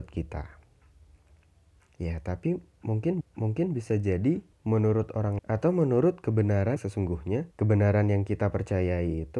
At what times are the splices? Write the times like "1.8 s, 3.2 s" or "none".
3.2 s, 4.5 s, 5.4 s, 6.8 s, 7.5 s